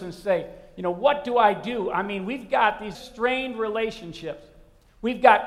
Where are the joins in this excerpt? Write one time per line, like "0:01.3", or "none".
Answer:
0:02.9